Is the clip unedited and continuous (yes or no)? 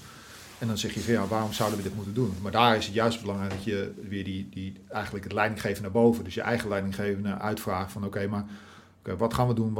yes